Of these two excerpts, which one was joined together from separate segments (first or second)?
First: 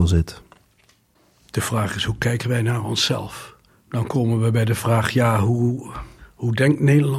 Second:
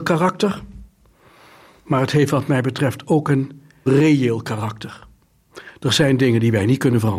second